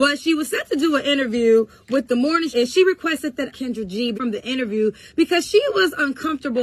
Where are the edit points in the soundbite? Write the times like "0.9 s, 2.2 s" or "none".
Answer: 2.5 s, 3.5 s, 4.1 s